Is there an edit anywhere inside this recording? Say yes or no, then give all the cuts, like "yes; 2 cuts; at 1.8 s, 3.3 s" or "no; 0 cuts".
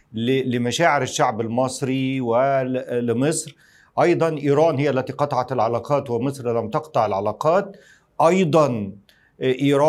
no; 0 cuts